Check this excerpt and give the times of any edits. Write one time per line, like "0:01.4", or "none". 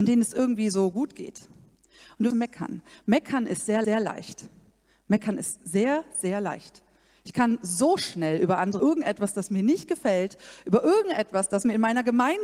0:02.3
0:03.8
0:08.8

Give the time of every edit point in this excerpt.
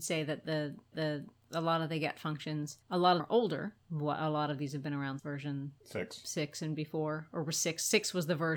0:00.9
0:02.8
0:03.2
0:03.8
0:05.2
0:05.8

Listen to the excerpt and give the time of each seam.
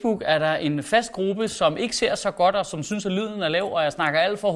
none

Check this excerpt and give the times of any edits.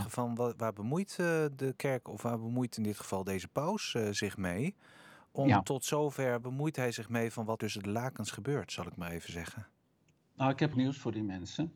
0:06.4
0:07.6
0:10.7

